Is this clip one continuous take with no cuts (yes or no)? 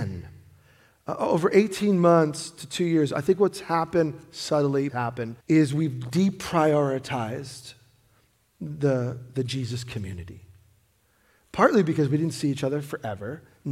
no